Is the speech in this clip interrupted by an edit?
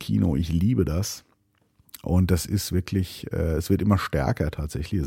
no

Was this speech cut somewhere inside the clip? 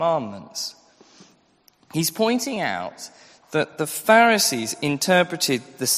no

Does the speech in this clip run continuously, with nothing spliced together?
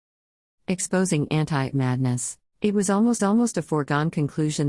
no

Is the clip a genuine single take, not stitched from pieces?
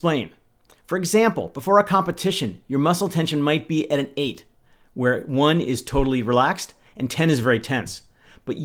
yes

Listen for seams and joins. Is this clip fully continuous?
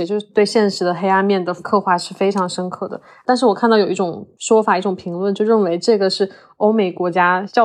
yes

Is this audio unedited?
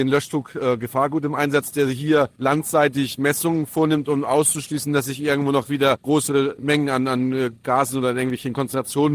yes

